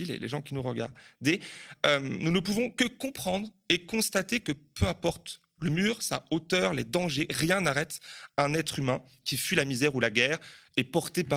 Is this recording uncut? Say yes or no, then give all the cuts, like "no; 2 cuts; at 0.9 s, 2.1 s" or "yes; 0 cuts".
yes; 0 cuts